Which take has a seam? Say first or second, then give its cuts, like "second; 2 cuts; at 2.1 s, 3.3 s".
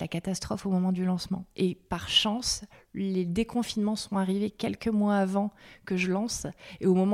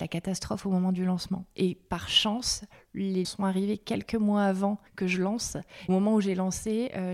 second; 3 cuts; at 3.2 s, 4.9 s, 5.9 s